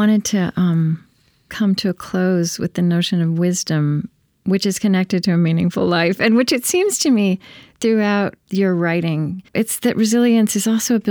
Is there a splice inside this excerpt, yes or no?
yes